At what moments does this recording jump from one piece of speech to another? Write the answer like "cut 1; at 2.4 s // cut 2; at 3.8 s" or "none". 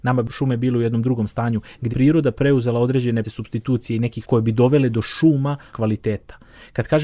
cut 1; at 1.9 s // cut 2; at 3.2 s // cut 3; at 4.2 s // cut 4; at 5.7 s